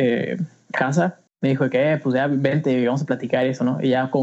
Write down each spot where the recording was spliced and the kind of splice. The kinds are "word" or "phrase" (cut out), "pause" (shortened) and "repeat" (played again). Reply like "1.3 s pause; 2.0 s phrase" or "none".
1.3 s pause